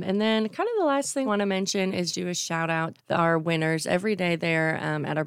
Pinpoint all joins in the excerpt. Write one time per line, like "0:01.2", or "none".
0:01.3
0:02.1
0:03.0